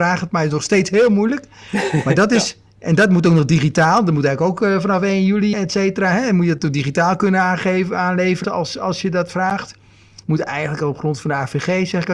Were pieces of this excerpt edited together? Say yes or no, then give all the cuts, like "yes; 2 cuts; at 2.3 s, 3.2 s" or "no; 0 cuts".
yes; 2 cuts; at 5.5 s, 8.4 s